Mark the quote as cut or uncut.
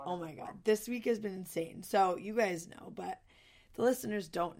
uncut